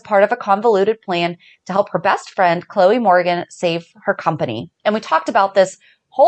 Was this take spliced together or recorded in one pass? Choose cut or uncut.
uncut